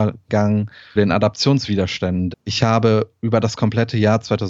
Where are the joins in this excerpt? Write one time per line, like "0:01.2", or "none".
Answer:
0:01.0
0:02.3